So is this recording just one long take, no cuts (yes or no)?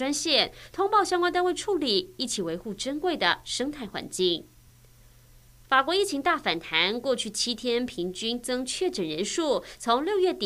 yes